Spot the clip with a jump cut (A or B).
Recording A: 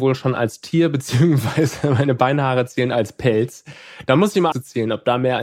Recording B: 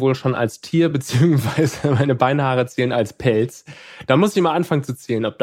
A